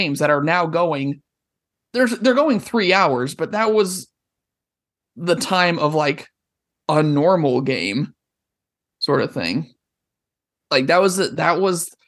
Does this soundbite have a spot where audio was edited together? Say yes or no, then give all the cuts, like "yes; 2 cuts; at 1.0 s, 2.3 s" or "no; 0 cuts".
no; 0 cuts